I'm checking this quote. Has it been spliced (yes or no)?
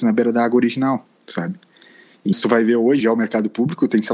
yes